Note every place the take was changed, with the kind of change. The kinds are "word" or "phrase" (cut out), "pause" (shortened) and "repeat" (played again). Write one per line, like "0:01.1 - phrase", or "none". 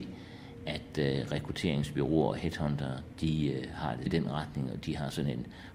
0:04.1 - word